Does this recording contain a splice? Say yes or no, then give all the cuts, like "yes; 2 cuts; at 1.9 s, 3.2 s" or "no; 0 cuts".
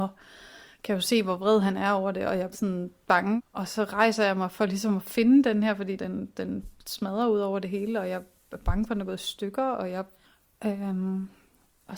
yes; 3 cuts; at 2.5 s, 6.0 s, 10.2 s